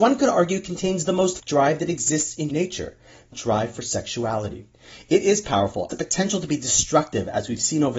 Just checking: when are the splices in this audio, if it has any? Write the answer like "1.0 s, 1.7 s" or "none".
1.4 s, 2.5 s, 3.3 s, 5.9 s